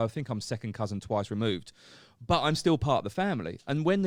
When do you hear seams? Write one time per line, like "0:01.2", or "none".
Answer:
none